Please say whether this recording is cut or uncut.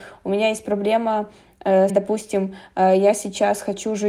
cut